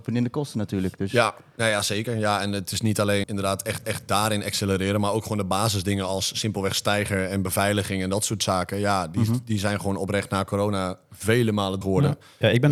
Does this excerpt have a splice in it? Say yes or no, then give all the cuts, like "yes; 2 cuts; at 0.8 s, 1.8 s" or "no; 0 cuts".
yes; 3 cuts; at 3.2 s, 3.8 s, 11.8 s